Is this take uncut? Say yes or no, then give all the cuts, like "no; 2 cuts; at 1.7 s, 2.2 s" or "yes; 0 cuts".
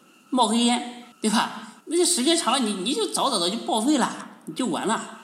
no; 2 cuts; at 1.1 s, 1.8 s